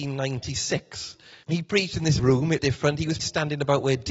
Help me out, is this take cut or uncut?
cut